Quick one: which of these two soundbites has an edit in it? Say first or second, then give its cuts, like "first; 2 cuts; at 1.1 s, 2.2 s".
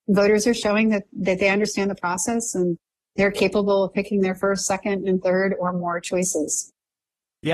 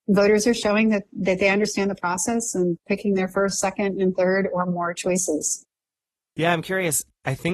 second; 1 cut; at 2.9 s